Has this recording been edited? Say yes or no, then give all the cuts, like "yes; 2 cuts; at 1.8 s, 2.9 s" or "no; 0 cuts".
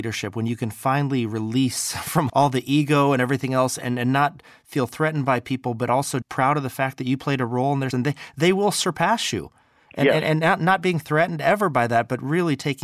yes; 3 cuts; at 2.3 s, 6.2 s, 7.9 s